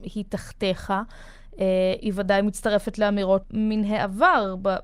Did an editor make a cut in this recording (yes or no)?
yes